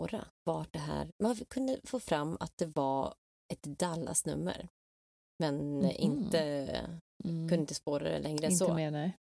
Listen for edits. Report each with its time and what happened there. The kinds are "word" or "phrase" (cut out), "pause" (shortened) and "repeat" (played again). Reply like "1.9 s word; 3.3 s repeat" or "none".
7.1 s pause

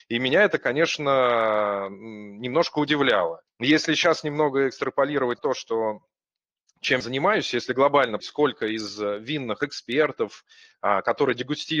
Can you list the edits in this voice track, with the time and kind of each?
3.5 s pause; 5.4 s word; 7.0 s word; 8.2 s word

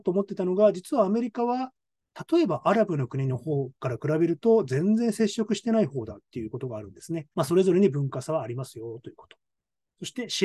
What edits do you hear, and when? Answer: 7.3 s pause

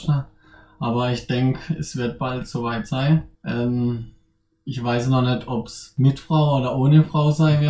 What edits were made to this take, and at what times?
3.3 s pause

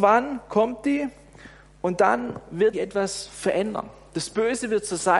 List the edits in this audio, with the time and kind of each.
2.7 s word

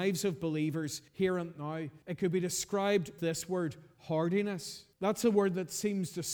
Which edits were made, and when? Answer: 1.1 s pause; 2.0 s pause; 3.2 s word; 4.9 s pause

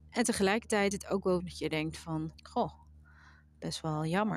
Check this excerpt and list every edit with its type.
0.9 s word; 1.4 s word; 2.3 s word

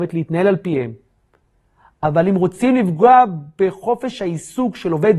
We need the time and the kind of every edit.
none

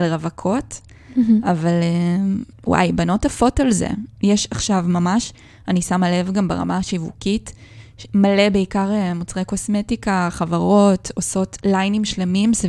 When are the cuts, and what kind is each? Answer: 2.5 s pause

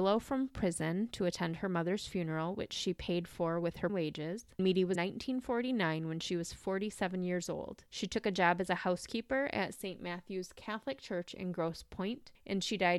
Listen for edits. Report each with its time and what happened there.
3.9 s word; 4.6 s word; 5.0 s phrase

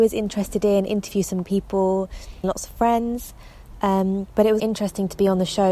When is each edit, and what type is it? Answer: 1.4 s word; 2.4 s word; 4.6 s word

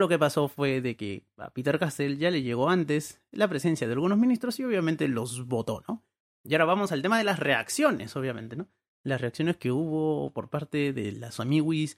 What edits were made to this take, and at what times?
none

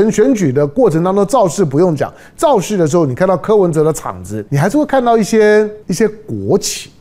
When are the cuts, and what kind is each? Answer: 4.5 s pause; 5.8 s pause

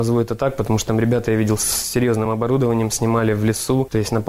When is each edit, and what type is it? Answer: none

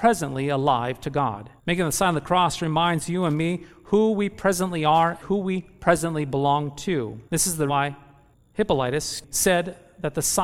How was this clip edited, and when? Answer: 1.6 s pause; 5.2 s word; 7.3 s pause; 7.7 s word

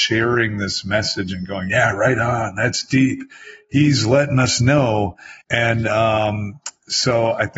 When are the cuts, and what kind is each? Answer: 5.4 s pause

